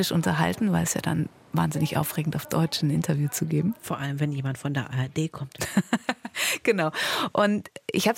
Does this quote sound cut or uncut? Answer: uncut